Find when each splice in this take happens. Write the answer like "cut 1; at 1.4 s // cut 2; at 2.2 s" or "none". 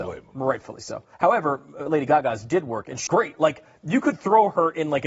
cut 1; at 1.1 s // cut 2; at 3.1 s